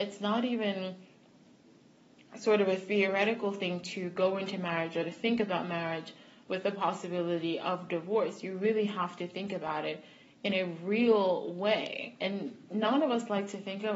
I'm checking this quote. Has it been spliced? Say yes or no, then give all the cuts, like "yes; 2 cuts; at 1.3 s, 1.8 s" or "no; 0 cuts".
no; 0 cuts